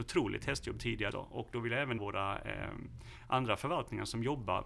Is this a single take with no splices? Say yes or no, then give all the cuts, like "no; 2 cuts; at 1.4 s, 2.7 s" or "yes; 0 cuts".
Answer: no; 2 cuts; at 1.1 s, 2.0 s